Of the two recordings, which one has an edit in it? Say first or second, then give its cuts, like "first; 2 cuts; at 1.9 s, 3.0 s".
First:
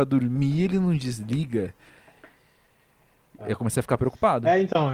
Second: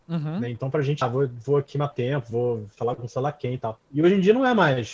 second; 4 cuts; at 1.0 s, 1.9 s, 2.7 s, 3.8 s